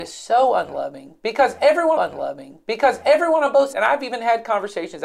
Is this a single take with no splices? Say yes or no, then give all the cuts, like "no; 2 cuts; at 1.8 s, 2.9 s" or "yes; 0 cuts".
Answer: no; 2 cuts; at 2.0 s, 3.7 s